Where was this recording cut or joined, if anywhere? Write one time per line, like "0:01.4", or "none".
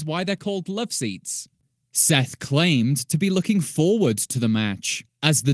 none